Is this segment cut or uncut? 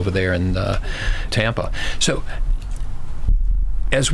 cut